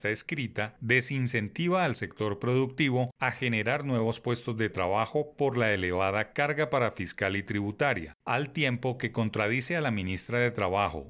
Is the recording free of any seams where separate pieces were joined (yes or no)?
yes